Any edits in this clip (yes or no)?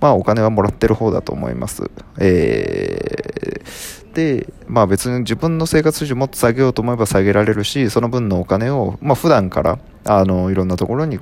yes